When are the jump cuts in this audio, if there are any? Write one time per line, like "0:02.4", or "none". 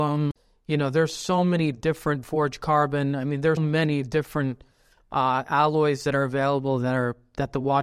0:03.6